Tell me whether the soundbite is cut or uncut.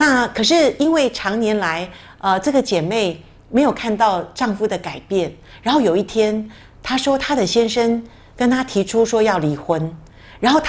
uncut